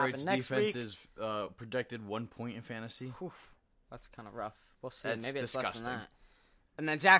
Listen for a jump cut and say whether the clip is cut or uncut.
uncut